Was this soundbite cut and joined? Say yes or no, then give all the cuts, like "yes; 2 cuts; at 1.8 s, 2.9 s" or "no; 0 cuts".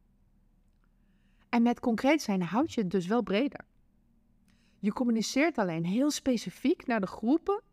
no; 0 cuts